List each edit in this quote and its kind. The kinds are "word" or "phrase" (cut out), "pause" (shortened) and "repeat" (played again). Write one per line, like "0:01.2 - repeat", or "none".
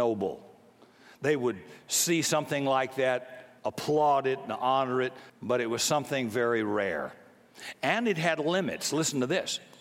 0:03.6 - pause
0:05.3 - pause

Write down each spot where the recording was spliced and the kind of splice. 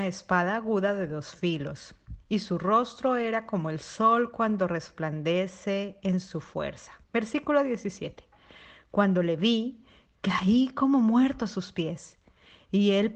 0:07.0 - pause

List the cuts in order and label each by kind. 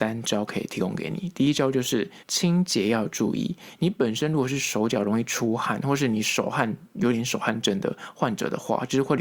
0:02.2 - pause

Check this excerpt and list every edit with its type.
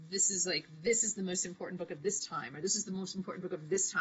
none

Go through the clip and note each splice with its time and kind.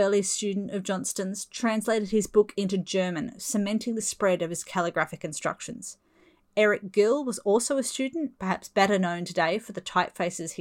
none

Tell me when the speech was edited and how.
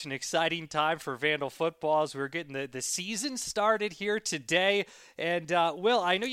none

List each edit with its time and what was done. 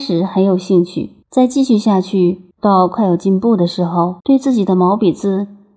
0:01.2 - pause
0:02.5 - pause
0:04.2 - pause

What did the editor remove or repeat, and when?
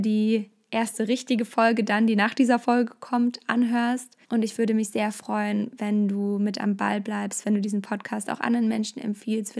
0:04.2 - pause

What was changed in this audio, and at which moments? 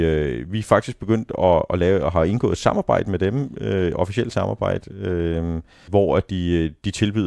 0:05.9 - word

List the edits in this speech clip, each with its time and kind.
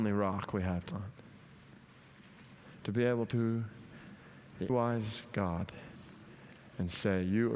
0:00.9 - word
0:03.3 - word
0:04.7 - word

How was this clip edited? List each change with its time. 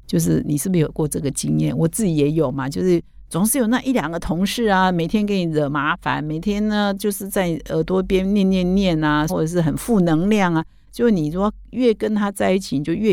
0:09.3 - phrase

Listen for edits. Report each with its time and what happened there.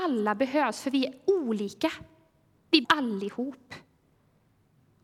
0:02.8 - word

